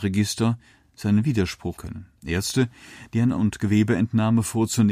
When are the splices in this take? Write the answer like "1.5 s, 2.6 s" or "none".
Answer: 1.8 s, 2.2 s, 3.4 s